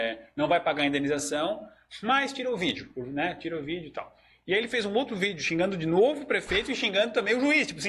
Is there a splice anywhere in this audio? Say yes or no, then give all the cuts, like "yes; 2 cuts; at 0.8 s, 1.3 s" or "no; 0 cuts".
no; 0 cuts